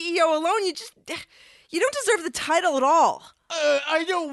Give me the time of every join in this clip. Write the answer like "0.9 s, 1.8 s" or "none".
none